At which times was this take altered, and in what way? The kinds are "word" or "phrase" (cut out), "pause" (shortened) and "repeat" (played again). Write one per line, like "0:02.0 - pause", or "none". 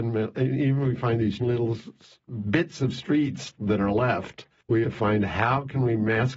0:01.4 - word
0:04.8 - phrase